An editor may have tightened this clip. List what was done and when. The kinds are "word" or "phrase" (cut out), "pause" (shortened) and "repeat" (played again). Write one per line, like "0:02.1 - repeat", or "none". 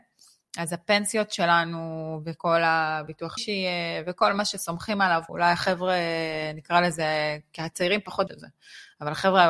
0:03.4 - word
0:05.3 - word
0:08.3 - word